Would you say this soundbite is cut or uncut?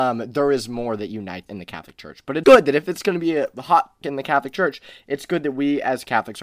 cut